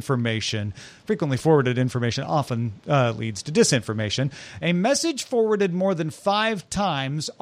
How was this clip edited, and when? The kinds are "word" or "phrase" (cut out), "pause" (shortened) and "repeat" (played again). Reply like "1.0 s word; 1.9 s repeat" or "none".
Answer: none